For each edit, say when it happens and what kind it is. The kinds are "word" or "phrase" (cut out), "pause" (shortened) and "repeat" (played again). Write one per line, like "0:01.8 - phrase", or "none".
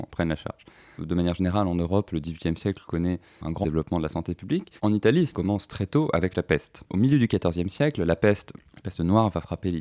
0:03.6 - phrase
0:04.8 - pause
0:05.3 - phrase